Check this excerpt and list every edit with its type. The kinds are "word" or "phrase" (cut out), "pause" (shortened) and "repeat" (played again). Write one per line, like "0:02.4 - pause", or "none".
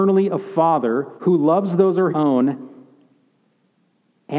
0:01.2 - pause
0:02.1 - word